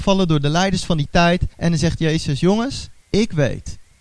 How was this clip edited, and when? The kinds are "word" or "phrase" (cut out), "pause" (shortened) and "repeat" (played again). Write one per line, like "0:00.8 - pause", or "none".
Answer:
0:01.5 - pause
0:03.0 - pause